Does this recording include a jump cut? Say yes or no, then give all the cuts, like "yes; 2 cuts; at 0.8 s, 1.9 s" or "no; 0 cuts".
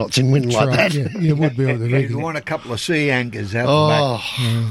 no; 0 cuts